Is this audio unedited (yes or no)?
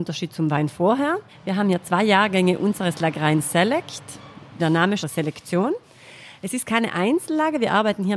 no